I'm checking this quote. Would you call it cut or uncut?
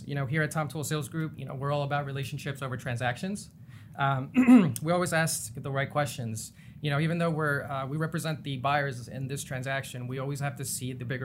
uncut